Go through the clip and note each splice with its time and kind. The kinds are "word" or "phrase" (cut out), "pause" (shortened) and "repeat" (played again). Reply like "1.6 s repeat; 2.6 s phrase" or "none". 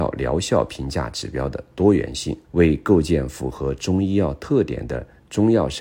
2.4 s pause